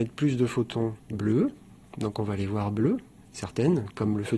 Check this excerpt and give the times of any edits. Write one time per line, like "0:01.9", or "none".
0:01.0